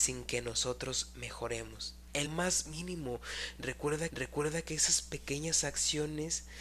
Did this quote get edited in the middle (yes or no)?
yes